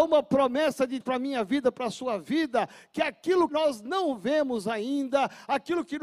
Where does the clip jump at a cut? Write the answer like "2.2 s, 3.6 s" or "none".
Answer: 1.0 s, 3.5 s

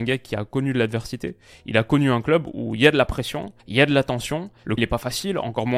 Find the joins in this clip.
3.6 s, 4.8 s

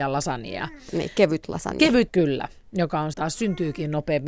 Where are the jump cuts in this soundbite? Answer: 2.1 s, 3.1 s

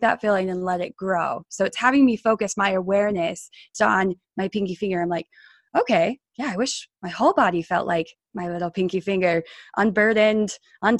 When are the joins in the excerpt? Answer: 3.7 s

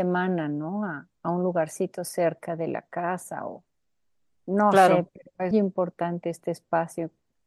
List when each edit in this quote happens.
5.5 s

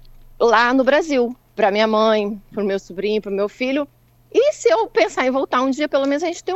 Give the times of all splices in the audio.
none

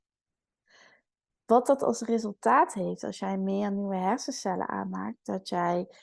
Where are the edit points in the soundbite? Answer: none

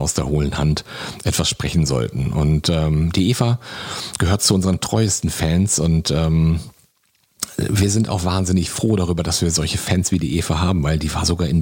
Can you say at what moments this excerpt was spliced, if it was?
none

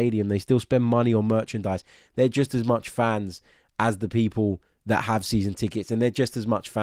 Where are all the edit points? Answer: none

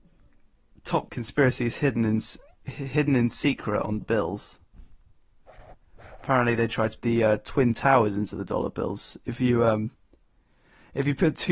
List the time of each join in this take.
1.1 s, 4.0 s, 7.0 s

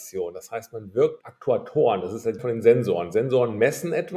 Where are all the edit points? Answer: 1.2 s, 2.4 s

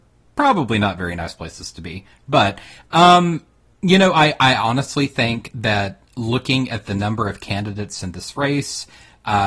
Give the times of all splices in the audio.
none

